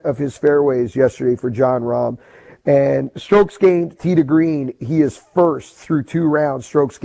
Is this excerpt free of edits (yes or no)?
yes